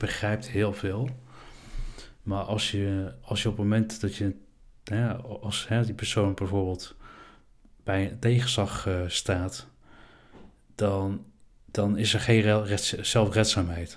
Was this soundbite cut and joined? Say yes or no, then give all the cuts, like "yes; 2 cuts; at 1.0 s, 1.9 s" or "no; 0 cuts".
no; 0 cuts